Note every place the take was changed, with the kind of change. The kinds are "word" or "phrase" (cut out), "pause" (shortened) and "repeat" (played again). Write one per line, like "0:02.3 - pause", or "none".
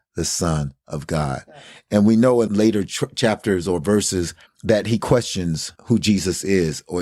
0:04.5 - pause
0:05.7 - pause